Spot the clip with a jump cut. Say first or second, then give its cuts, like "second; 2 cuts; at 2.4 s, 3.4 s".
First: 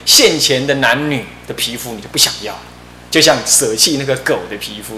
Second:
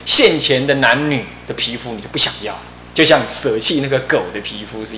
second; 1 cut; at 2.9 s